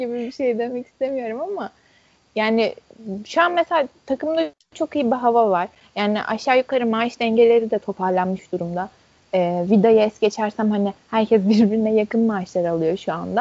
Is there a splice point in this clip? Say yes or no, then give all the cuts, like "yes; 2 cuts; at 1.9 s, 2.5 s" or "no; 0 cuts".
no; 0 cuts